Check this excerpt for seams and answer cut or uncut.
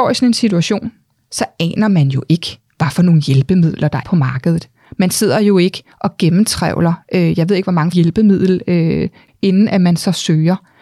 cut